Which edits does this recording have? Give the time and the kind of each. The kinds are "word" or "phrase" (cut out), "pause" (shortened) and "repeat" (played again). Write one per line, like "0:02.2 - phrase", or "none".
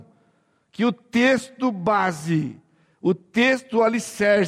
none